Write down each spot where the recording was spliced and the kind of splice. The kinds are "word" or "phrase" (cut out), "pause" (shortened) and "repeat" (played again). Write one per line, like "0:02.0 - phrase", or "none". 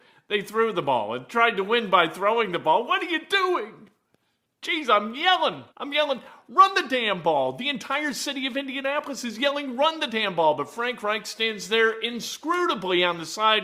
0:05.7 - pause